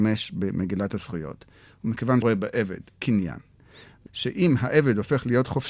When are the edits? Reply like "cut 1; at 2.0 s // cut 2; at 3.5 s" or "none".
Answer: cut 1; at 2.2 s // cut 2; at 4.1 s